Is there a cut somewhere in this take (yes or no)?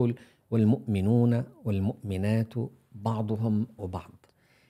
yes